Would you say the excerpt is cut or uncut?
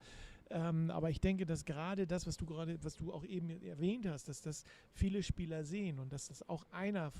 uncut